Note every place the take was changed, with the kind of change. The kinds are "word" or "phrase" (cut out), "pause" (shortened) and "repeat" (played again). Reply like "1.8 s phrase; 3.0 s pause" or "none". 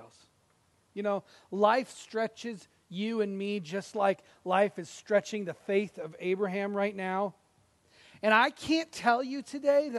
none

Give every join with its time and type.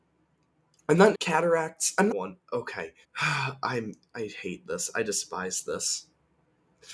1.1 s phrase; 2.1 s phrase; 3.0 s pause

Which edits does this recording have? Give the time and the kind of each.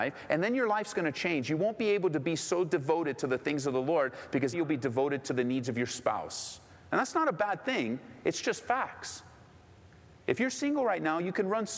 4.5 s word

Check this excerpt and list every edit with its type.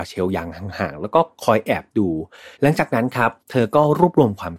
2.5 s pause; 3.4 s pause

